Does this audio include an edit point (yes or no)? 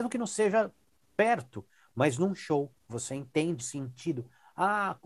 yes